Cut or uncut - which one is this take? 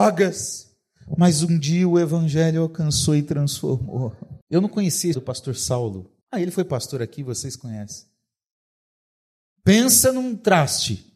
cut